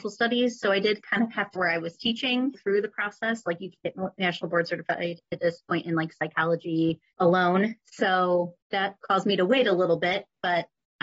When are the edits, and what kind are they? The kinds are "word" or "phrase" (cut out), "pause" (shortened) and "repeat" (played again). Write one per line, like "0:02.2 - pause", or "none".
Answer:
0:01.6 - phrase
0:02.5 - phrase
0:03.8 - word
0:07.1 - phrase
0:08.6 - pause